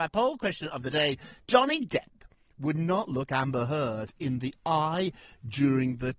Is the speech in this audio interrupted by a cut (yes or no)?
no